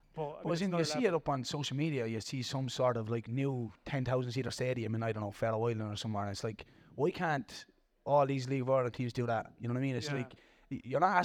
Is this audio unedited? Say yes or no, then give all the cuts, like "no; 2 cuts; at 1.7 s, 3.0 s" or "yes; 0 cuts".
yes; 0 cuts